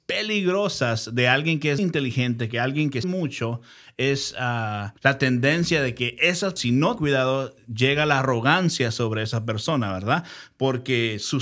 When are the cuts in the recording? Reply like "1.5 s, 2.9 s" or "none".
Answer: 1.8 s, 3.0 s, 5.0 s, 6.6 s, 7.0 s